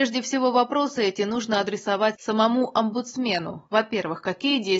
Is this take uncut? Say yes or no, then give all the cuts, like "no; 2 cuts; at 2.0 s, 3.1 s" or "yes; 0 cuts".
yes; 0 cuts